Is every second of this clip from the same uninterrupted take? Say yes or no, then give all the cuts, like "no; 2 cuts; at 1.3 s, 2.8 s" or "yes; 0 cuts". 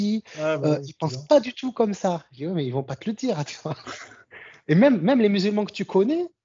yes; 0 cuts